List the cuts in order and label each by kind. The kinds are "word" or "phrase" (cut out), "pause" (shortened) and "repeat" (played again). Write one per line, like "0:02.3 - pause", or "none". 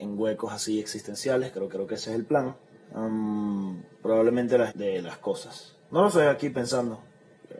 0:01.7 - repeat
0:02.7 - pause
0:04.7 - phrase
0:05.8 - pause